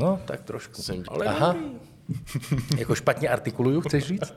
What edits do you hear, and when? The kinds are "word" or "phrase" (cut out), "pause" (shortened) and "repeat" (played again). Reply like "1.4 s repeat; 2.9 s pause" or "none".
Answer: 1.1 s word